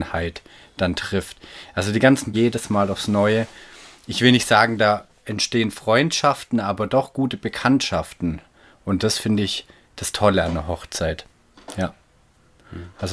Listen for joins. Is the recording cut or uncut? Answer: cut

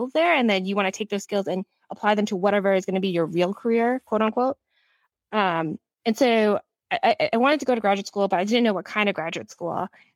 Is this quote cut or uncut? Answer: uncut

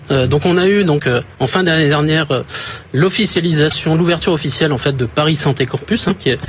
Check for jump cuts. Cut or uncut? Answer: uncut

